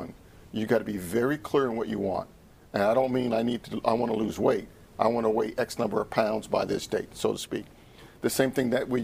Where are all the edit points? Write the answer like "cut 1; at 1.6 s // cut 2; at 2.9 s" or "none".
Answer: none